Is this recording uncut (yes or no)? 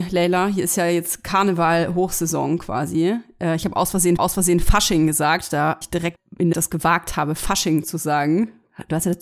no